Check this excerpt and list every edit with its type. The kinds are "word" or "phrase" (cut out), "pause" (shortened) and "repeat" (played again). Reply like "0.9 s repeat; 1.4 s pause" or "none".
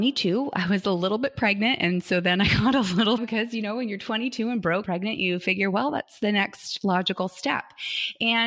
3.2 s phrase; 4.8 s word